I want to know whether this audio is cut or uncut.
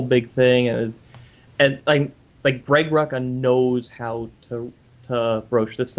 uncut